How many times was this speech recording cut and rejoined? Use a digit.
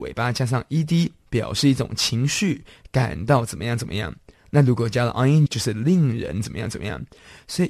1